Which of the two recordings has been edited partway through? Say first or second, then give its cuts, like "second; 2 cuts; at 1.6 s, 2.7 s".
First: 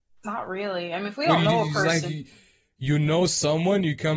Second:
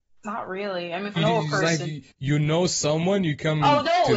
second; 2 cuts; at 1.2 s, 2.1 s